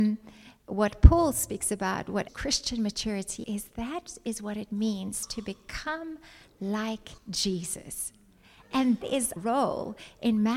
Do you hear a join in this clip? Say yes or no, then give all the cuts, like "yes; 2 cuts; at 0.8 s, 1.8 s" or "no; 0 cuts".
yes; 5 cuts; at 2.3 s, 3.4 s, 7.2 s, 9.0 s, 9.4 s